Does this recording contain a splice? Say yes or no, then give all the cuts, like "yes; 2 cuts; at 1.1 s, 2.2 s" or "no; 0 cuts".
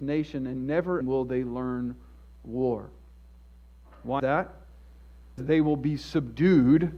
yes; 3 cuts; at 1.0 s, 4.2 s, 5.4 s